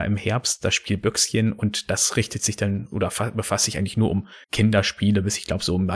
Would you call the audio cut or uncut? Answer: cut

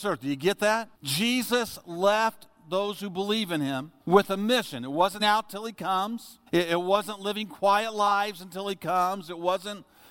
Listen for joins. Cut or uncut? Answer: cut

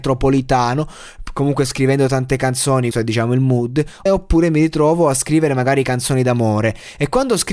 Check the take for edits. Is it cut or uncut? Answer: cut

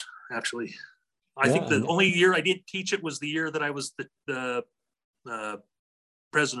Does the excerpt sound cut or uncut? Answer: uncut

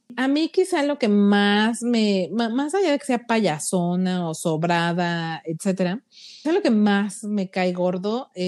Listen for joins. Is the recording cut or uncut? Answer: cut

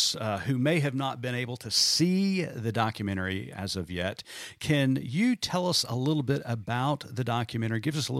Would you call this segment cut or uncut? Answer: uncut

